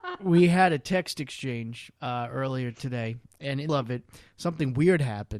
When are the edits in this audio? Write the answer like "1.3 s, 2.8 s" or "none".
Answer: 2.0 s, 3.7 s